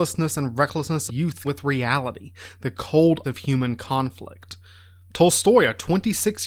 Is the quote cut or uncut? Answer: cut